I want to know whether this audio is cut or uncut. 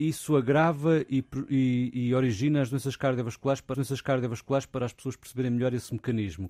cut